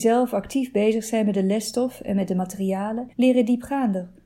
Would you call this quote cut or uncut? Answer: cut